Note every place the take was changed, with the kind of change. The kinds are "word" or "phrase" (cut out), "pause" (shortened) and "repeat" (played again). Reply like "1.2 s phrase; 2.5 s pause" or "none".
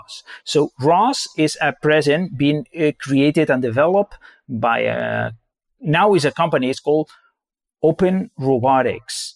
none